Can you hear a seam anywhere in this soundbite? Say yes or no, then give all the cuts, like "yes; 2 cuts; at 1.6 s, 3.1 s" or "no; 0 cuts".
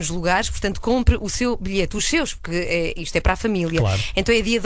no; 0 cuts